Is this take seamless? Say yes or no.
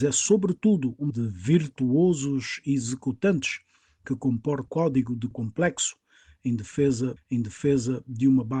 no